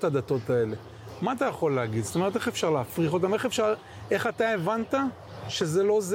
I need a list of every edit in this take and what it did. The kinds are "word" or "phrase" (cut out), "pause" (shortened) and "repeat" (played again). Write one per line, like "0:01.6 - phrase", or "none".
none